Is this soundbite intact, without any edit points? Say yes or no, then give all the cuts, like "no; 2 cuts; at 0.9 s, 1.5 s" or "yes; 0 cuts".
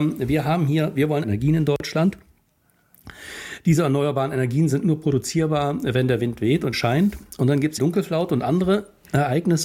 no; 3 cuts; at 1.2 s, 6.7 s, 7.8 s